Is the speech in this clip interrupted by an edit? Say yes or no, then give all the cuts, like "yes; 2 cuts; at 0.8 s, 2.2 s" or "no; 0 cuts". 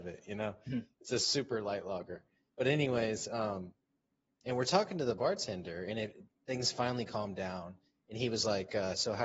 no; 0 cuts